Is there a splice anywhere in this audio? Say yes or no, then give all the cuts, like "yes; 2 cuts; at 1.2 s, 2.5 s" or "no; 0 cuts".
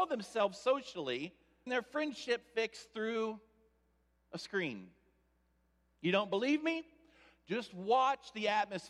yes; 1 cut; at 1.7 s